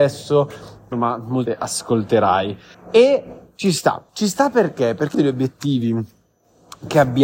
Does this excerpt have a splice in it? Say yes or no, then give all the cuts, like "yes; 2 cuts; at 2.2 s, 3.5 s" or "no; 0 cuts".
yes; 5 cuts; at 0.9 s, 1.5 s, 2.7 s, 4.1 s, 5.1 s